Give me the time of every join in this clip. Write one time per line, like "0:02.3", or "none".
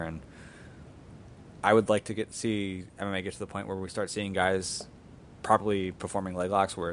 none